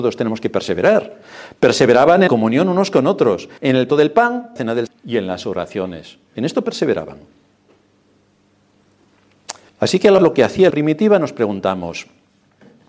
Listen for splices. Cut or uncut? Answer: cut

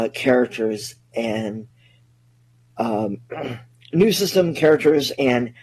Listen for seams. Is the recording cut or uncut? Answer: uncut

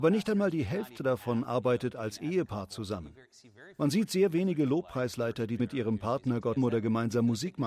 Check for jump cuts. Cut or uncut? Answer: cut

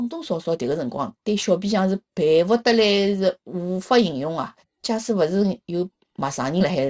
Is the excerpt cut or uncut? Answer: cut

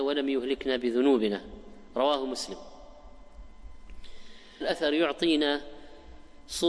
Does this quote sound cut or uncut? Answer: cut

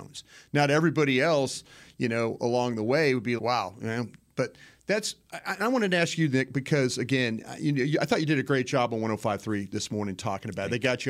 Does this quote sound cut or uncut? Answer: cut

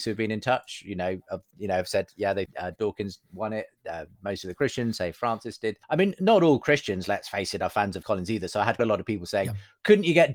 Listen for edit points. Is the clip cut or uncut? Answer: cut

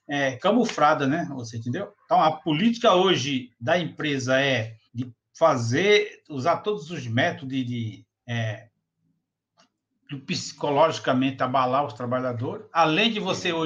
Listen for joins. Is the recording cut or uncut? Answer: cut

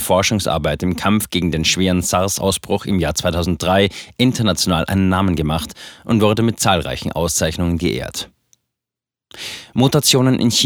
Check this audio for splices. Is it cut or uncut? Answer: uncut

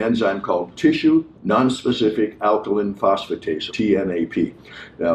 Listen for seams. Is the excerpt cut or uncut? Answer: cut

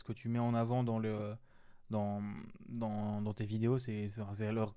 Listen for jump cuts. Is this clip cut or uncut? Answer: uncut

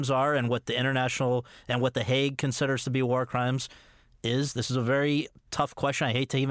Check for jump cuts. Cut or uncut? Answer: uncut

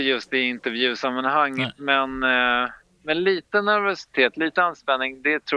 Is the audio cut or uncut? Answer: uncut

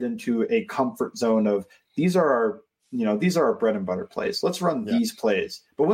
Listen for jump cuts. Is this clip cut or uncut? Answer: uncut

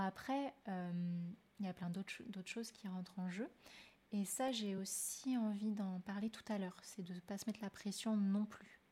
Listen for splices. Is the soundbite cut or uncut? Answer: uncut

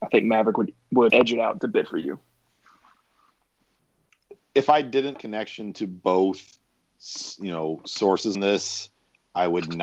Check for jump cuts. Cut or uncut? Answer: cut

